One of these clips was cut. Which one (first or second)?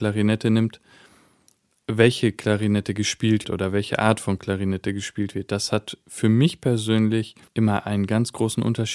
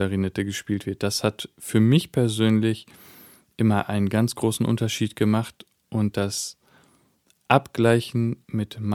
first